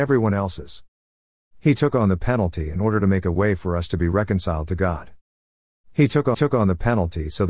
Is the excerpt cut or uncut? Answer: cut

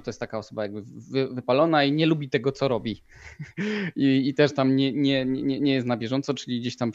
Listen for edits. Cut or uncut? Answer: uncut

